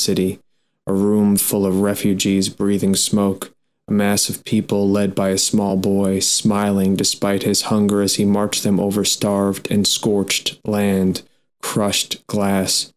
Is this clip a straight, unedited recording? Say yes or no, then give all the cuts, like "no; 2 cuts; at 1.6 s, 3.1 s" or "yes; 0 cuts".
yes; 0 cuts